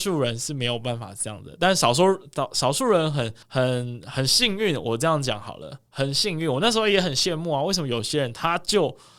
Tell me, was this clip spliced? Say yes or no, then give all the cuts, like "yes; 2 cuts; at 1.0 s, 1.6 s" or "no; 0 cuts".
yes; 1 cut; at 3.4 s